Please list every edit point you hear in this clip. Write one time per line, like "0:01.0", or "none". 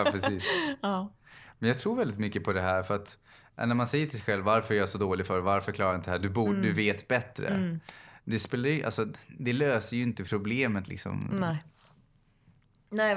none

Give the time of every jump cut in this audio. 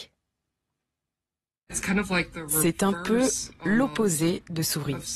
none

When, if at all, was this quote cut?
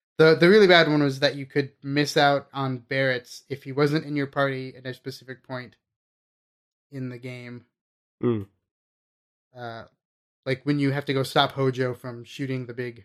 none

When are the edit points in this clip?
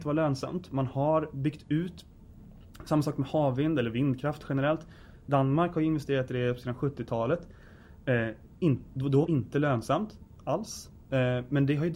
0:09.3

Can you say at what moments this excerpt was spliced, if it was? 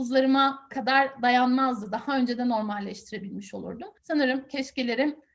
0:04.0

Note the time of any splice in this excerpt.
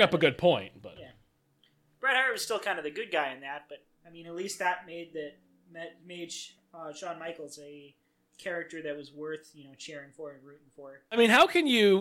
none

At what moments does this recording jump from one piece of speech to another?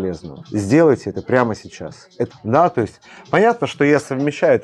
0:02.3

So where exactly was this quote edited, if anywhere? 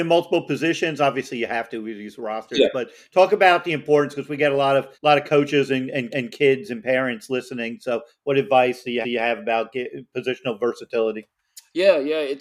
0:04.9
0:06.1
0:09.0

